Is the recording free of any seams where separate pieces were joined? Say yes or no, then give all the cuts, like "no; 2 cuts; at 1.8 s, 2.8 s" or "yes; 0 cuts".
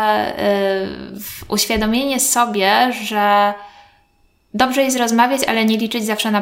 yes; 0 cuts